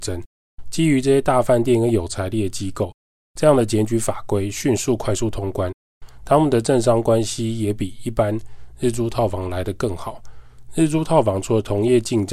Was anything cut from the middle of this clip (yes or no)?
no